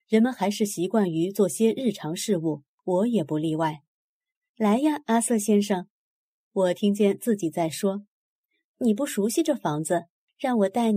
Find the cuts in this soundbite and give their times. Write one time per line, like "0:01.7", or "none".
none